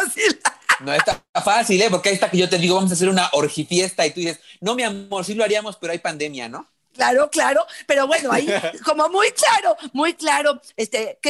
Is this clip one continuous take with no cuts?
yes; 0 cuts

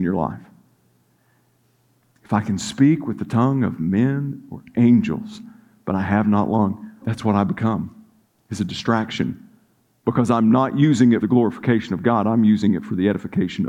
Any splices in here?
yes; 2 cuts; at 7.0 s, 11.2 s

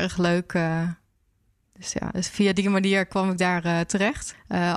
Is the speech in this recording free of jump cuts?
no; 1 cut; at 2.1 s

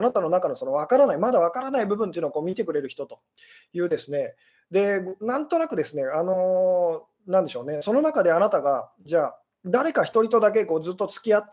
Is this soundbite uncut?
yes; 0 cuts

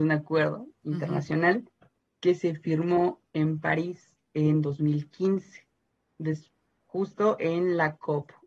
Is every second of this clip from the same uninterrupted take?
yes; 0 cuts

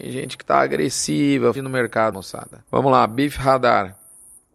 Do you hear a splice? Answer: yes; 3 cuts; at 1.5 s, 2.1 s, 2.7 s

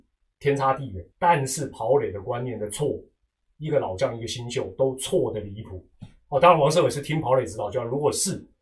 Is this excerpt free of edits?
no; 1 cut; at 1.1 s

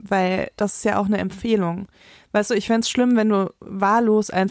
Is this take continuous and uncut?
yes; 0 cuts

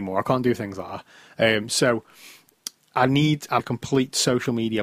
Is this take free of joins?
no; 1 cut; at 3.6 s

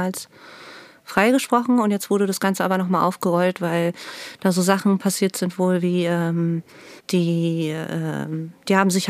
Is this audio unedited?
no; 1 cut; at 7.0 s

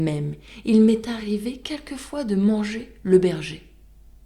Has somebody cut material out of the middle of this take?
no; 0 cuts

